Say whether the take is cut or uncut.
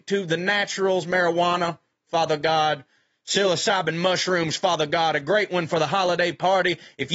uncut